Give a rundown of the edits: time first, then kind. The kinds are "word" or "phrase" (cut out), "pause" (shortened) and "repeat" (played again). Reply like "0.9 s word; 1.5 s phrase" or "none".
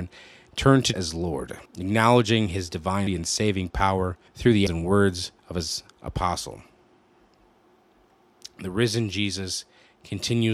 0.9 s word; 1.7 s pause; 3.1 s word; 4.3 s pause; 4.7 s word; 5.4 s pause; 5.9 s pause